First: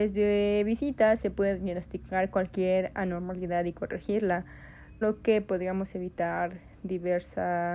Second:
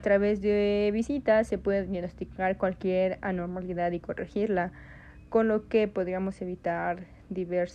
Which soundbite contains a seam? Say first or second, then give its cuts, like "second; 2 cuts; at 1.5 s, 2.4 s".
first; 1 cut; at 5.0 s